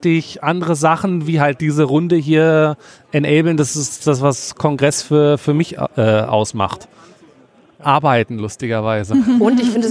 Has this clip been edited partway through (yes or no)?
no